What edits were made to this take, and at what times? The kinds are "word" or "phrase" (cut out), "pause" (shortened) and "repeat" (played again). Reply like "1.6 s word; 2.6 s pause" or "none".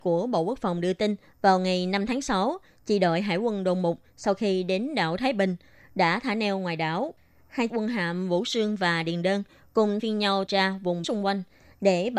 7.7 s word; 10.0 s word; 10.5 s word; 11.0 s word